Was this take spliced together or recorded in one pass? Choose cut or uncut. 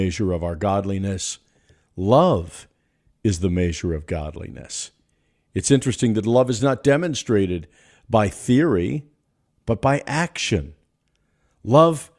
uncut